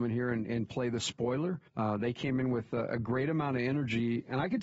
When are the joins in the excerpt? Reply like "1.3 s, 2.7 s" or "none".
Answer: 1.7 s